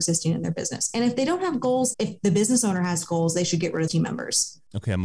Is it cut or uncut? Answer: cut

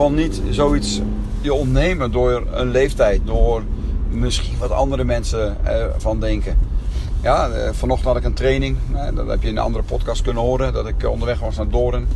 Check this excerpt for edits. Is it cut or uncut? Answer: uncut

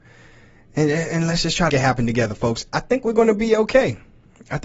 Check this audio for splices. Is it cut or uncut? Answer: cut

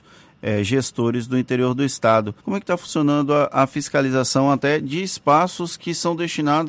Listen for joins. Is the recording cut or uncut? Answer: cut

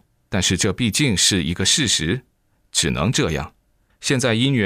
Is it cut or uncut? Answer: uncut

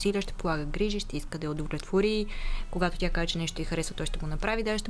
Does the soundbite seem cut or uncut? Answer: uncut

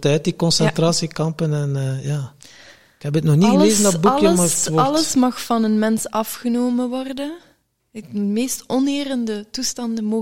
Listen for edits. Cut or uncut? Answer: uncut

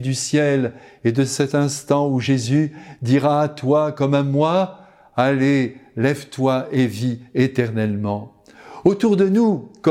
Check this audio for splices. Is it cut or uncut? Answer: uncut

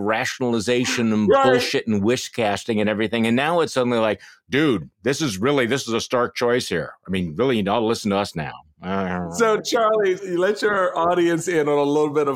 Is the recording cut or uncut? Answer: uncut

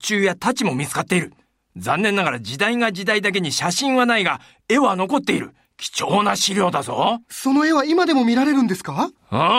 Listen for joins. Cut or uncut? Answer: cut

